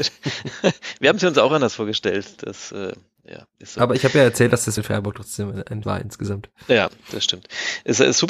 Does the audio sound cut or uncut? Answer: cut